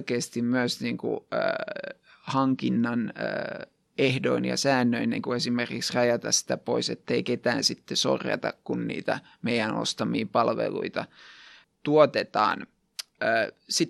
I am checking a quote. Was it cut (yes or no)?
no